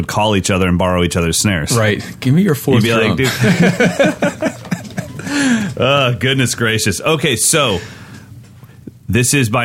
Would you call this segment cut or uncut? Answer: uncut